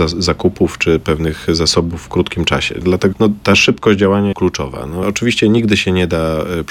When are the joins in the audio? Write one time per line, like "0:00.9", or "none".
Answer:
0:03.1
0:04.3
0:05.0